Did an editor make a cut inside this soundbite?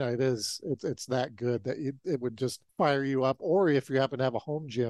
yes; 1 cut; at 2.7 s

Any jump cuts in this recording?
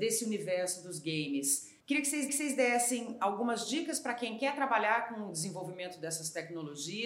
yes; 2 cuts; at 1.8 s, 2.3 s

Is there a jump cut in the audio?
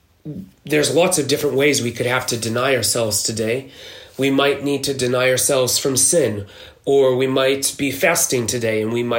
no; 0 cuts

